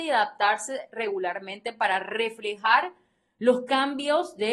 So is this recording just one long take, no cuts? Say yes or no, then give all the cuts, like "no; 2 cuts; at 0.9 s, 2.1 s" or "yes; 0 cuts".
yes; 0 cuts